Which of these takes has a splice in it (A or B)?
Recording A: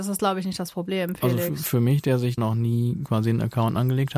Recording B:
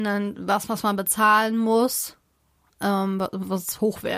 A